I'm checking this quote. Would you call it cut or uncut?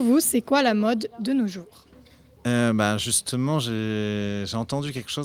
uncut